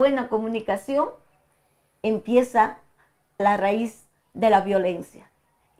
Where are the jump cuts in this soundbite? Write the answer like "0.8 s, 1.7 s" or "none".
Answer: 3.4 s